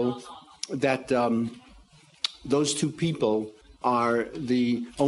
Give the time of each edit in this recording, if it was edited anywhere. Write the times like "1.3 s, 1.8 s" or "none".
3.6 s